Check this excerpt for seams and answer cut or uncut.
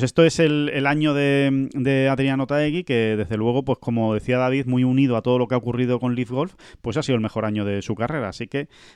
uncut